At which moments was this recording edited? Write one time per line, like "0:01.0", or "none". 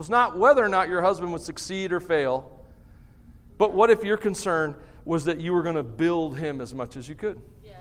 none